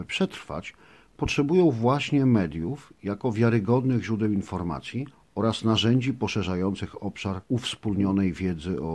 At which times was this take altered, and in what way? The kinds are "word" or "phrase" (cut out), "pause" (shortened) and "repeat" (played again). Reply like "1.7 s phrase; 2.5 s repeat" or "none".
7.4 s pause